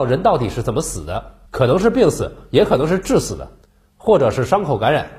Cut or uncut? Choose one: cut